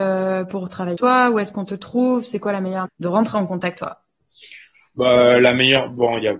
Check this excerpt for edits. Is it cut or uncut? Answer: cut